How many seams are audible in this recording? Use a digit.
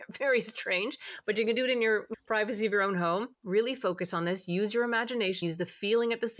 3